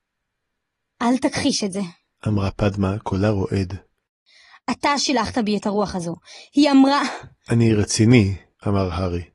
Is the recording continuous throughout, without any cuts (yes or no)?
yes